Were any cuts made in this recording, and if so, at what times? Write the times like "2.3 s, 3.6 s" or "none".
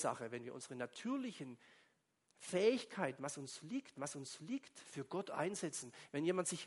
3.9 s

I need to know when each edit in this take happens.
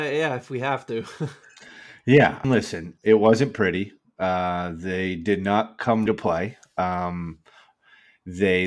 2.4 s, 3.0 s, 6.1 s

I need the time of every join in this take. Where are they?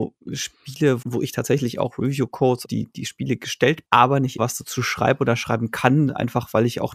1.0 s, 2.6 s, 3.8 s, 4.4 s

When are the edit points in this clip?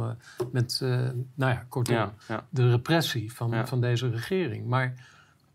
2.2 s

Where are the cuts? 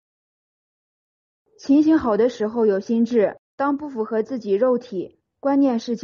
3.5 s

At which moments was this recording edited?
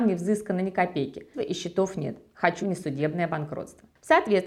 1.3 s, 2.6 s

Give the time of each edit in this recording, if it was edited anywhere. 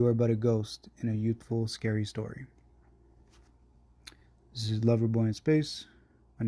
none

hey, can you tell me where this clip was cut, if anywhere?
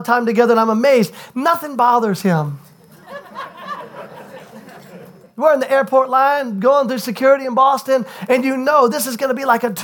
none

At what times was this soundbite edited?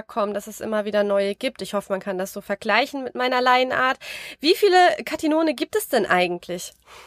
none

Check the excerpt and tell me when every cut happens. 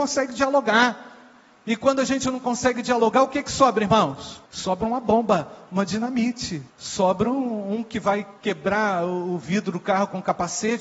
4.5 s, 6.7 s, 8.4 s

